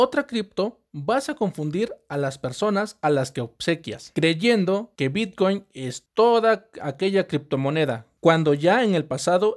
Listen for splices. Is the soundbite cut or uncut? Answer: uncut